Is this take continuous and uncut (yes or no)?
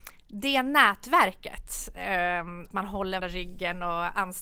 no